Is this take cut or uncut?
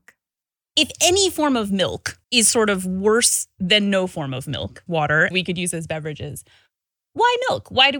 cut